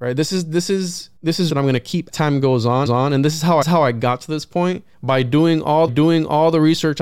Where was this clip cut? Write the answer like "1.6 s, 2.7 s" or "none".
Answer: 1.2 s, 1.5 s, 2.1 s, 2.9 s, 3.6 s, 4.9 s, 5.9 s